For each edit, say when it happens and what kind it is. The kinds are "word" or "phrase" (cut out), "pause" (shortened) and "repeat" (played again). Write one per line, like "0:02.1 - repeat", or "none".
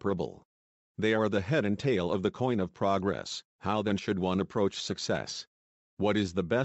0:03.5 - pause